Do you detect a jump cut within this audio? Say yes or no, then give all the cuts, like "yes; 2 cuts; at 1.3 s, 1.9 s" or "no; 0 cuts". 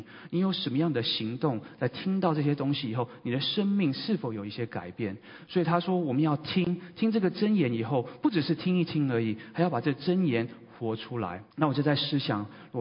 yes; 1 cut; at 11.5 s